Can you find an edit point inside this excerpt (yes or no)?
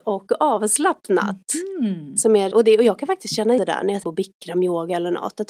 yes